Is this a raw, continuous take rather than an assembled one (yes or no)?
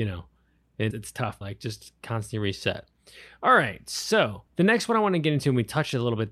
no